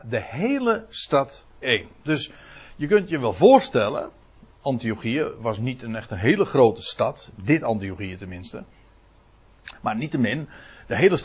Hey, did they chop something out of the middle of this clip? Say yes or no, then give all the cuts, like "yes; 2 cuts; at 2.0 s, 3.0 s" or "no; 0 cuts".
yes; 1 cut; at 1.6 s